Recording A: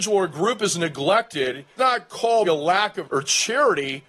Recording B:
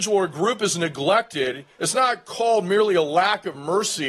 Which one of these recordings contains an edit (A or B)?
A